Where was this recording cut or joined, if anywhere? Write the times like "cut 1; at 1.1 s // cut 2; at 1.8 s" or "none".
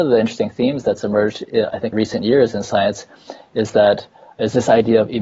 cut 1; at 1.9 s